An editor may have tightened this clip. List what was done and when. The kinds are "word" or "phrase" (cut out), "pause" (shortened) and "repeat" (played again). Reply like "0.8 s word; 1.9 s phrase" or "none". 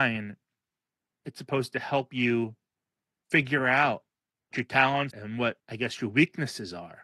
2.7 s pause; 4.5 s word; 5.1 s word; 5.6 s pause